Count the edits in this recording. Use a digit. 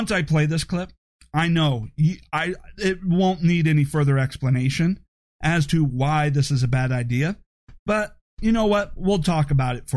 0